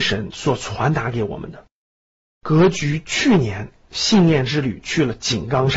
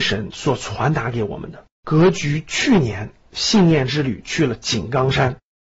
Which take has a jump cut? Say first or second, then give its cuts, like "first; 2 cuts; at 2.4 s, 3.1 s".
second; 1 cut; at 1.7 s